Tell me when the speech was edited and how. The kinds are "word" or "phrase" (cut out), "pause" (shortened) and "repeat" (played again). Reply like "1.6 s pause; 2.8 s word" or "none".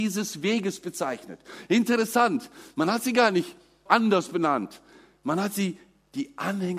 3.9 s word